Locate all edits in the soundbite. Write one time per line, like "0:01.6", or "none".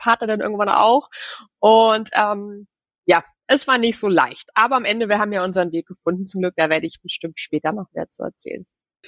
none